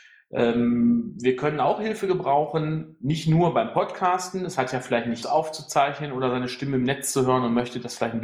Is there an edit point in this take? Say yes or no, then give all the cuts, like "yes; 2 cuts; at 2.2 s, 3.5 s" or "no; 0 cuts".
yes; 1 cut; at 5.2 s